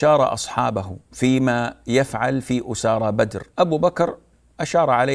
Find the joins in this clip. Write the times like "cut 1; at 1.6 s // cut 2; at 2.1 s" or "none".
cut 1; at 1.0 s // cut 2; at 3.5 s